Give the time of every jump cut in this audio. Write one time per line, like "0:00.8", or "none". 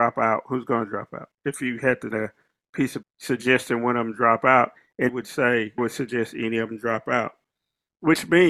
0:02.1
0:03.0
0:05.1
0:05.8